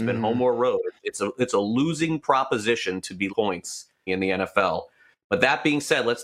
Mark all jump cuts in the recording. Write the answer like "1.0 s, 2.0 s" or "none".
1.0 s, 3.3 s, 4.1 s